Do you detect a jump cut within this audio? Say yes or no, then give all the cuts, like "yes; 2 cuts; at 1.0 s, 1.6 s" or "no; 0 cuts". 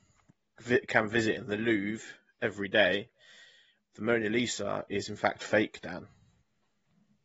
no; 0 cuts